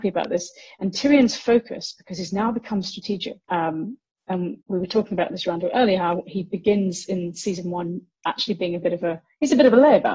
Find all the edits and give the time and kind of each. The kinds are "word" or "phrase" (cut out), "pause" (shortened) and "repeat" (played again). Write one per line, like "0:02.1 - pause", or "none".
0:03.4 - pause
0:04.6 - pause

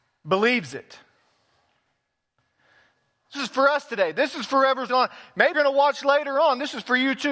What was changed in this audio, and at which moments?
0:03.3 - word
0:04.9 - word
0:05.5 - word

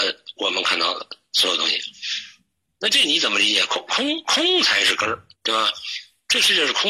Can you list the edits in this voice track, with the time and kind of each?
0:05.3 - pause

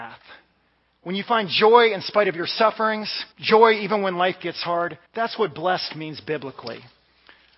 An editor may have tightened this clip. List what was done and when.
0:03.3 - pause
0:05.1 - pause

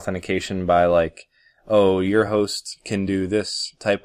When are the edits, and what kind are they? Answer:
none

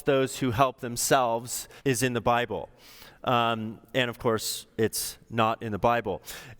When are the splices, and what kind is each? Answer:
0:01.8 - pause

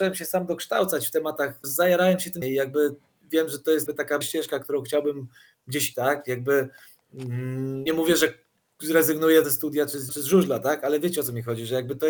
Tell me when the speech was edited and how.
0:01.6 - word
0:02.4 - word
0:03.9 - word
0:04.2 - word
0:05.9 - word
0:07.9 - word
0:09.4 - word
0:10.1 - word

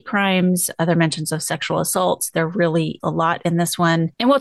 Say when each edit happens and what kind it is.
0:03.0 - word

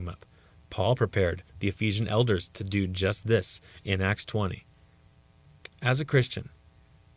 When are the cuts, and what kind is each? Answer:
0:01.5 - pause

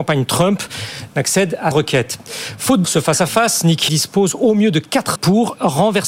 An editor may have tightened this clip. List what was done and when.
0:01.7 - word
0:02.8 - word
0:03.9 - word
0:05.1 - word

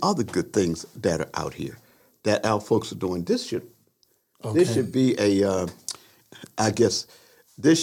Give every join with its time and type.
none

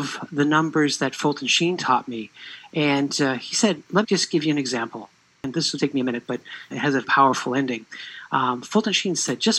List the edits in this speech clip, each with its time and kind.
0:04.0 - word
0:05.8 - word
0:06.7 - word
0:07.0 - word

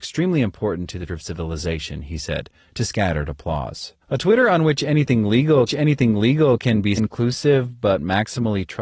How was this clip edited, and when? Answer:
0:01.1 - word
0:04.0 - pause
0:05.7 - repeat
0:07.0 - phrase

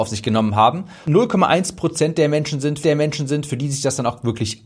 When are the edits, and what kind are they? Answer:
0:01.0 - phrase
0:02.8 - repeat

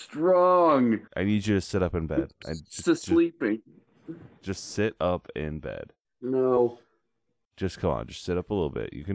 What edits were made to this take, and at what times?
0:01.1 - pause
0:06.0 - pause

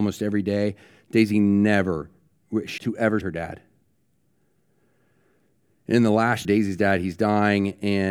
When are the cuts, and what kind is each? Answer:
0:02.8 - word
0:03.2 - word
0:06.4 - word

